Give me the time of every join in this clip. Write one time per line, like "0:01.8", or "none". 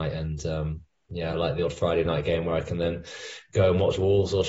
none